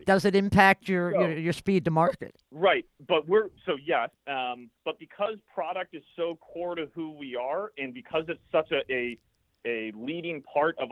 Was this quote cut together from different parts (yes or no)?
yes